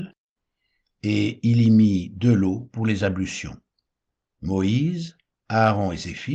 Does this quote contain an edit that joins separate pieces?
no; 0 cuts

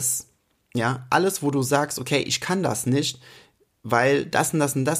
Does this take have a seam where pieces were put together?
no; 0 cuts

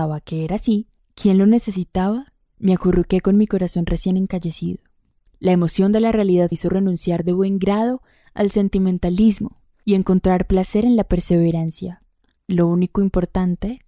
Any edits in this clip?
yes; 1 cut; at 6.5 s

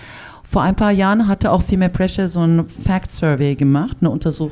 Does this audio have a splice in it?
no; 0 cuts

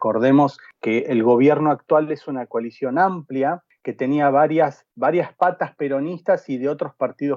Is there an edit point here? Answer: no; 0 cuts

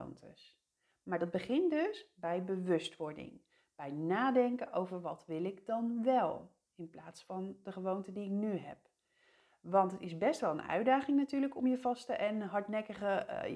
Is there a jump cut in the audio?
no; 0 cuts

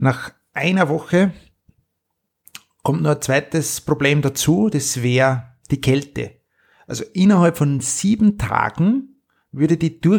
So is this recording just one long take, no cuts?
yes; 0 cuts

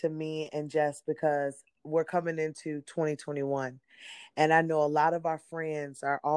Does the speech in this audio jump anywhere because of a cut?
no; 0 cuts

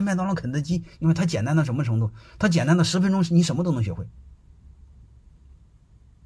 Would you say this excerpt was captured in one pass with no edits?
yes; 0 cuts

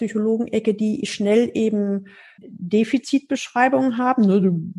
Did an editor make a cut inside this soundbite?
no; 0 cuts

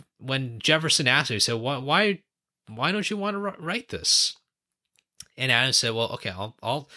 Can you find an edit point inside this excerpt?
no; 0 cuts

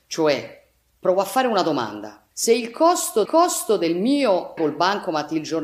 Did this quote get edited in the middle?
yes; 3 cuts; at 2.3 s, 3.3 s, 4.6 s

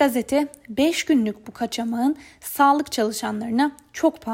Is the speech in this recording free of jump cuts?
yes; 0 cuts

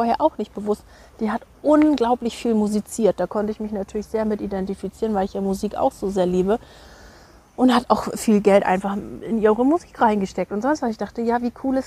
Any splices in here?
no; 0 cuts

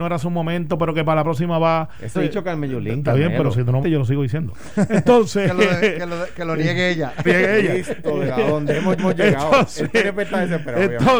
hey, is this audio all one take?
no; 4 cuts; at 2.1 s, 3.8 s, 7.2 s, 9.0 s

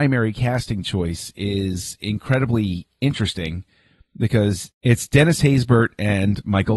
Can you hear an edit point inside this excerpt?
no; 0 cuts

